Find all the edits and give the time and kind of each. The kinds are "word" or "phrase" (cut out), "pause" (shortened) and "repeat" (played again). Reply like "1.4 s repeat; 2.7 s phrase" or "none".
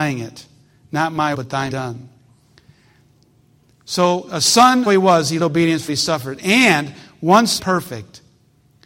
1.3 s word; 1.7 s word; 4.9 s word; 5.4 s word; 5.9 s word; 7.6 s word